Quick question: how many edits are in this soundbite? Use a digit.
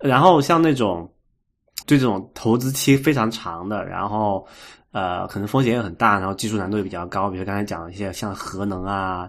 1